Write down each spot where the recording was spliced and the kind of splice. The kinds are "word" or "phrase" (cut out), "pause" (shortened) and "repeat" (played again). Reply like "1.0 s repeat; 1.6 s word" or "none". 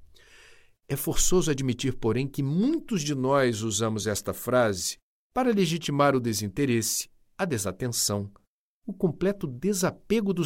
none